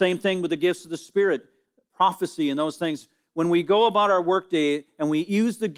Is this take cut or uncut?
uncut